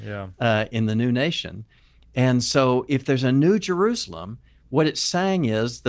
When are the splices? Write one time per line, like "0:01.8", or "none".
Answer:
none